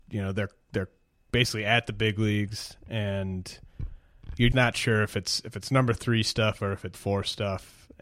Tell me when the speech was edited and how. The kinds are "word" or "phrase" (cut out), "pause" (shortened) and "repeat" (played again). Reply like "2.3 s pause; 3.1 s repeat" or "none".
4.5 s word; 6.9 s word

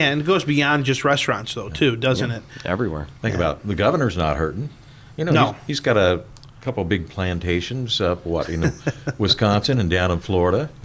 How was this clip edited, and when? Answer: none

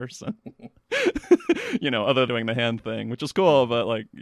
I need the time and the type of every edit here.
2.3 s word

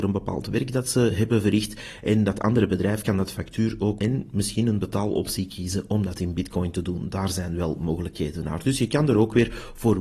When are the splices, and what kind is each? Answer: 4.0 s word

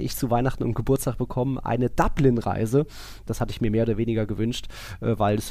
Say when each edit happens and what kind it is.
none

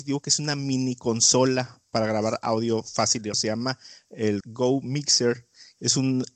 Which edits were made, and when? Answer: 3.3 s word; 4.4 s word

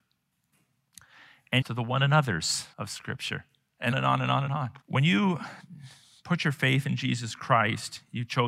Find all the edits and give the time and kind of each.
1.6 s phrase; 2.7 s pause; 3.9 s word; 4.5 s word; 4.8 s pause

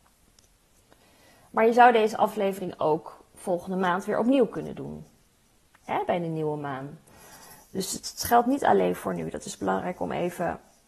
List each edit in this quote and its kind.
none

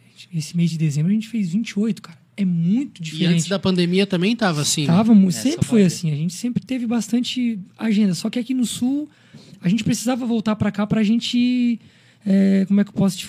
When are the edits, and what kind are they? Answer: none

